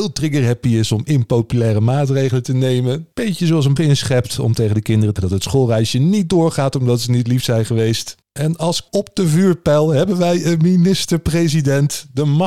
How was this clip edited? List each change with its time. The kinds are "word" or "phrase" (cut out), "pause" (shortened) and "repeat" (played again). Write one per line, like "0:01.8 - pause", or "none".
0:03.1 - pause
0:03.8 - phrase
0:05.2 - word
0:08.2 - pause
0:08.9 - word